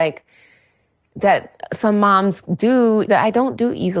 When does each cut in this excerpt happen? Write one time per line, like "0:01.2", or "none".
0:03.1